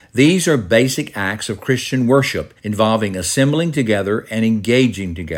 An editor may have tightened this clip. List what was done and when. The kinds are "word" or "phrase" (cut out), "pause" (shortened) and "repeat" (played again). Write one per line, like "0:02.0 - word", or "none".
0:02.6 - pause